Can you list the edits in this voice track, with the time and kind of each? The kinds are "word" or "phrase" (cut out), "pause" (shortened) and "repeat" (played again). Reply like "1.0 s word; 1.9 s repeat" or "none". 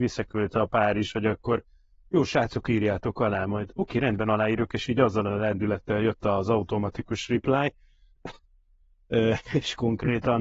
none